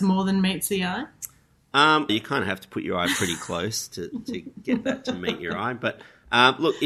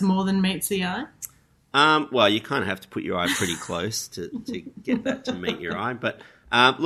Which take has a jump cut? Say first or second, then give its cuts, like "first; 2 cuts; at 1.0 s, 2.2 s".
first; 1 cut; at 2.1 s